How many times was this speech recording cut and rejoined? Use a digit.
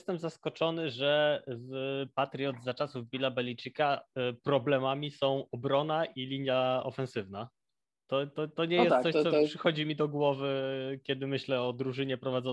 0